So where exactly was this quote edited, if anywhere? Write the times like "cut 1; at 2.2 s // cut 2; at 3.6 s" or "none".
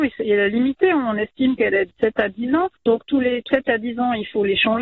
cut 1; at 2.7 s // cut 2; at 3.5 s